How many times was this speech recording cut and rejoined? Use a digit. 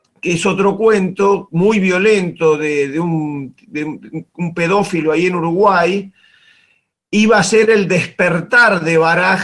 0